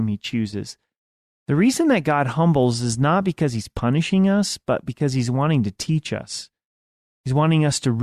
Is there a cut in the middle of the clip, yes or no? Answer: no